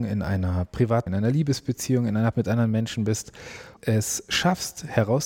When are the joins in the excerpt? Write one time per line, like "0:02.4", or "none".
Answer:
0:01.1
0:02.3
0:03.8